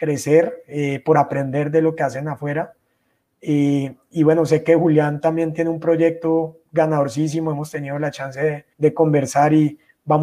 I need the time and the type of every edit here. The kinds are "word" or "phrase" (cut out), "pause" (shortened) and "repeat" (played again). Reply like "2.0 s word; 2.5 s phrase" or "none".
8.7 s pause